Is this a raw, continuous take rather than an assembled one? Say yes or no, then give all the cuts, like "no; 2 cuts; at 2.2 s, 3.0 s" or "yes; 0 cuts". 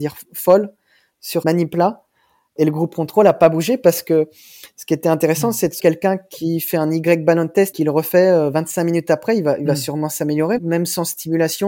no; 4 cuts; at 1.4 s, 5.8 s, 7.7 s, 10.6 s